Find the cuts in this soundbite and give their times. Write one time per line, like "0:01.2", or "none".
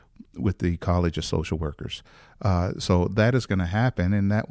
none